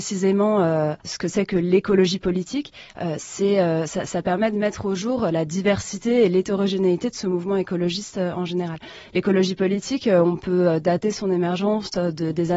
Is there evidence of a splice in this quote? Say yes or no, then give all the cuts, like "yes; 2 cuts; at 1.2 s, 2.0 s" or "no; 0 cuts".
yes; 1 cut; at 1.0 s